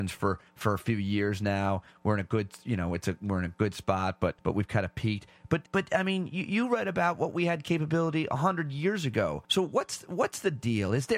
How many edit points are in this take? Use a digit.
3